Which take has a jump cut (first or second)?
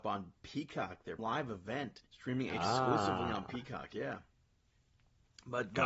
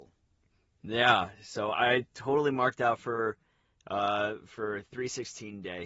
first